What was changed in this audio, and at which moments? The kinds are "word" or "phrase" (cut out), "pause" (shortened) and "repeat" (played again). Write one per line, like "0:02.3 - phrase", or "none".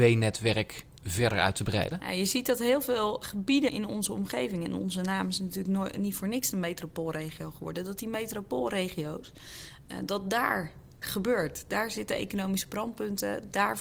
0:03.2 - word
0:03.7 - word
0:11.0 - word